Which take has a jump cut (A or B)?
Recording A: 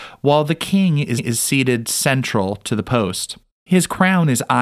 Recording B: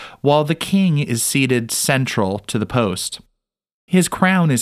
A